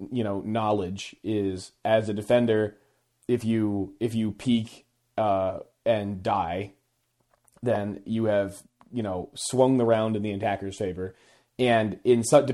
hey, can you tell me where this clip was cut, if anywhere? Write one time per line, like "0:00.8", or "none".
none